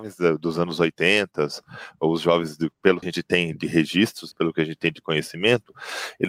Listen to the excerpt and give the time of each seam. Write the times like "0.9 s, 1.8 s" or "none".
3.0 s, 4.3 s